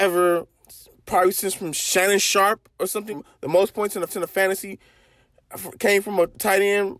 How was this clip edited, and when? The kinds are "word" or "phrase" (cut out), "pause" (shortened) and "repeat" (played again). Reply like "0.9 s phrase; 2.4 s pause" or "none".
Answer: 3.1 s word; 4.1 s repeat